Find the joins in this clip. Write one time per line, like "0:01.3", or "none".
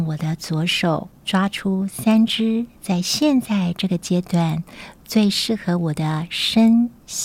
none